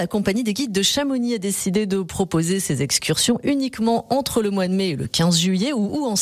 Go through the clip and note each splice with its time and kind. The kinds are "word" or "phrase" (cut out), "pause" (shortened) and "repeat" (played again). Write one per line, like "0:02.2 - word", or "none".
none